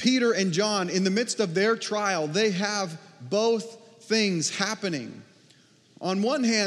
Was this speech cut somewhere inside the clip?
no; 0 cuts

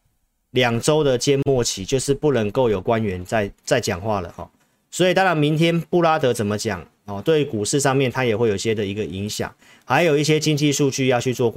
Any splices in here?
no; 0 cuts

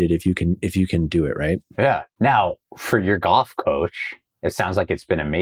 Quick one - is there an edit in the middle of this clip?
yes; 1 cut; at 2.1 s

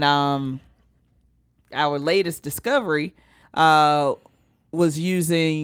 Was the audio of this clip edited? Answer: yes; 1 cut; at 3.4 s

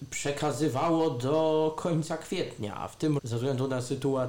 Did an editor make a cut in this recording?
yes; 1 cut; at 3.2 s

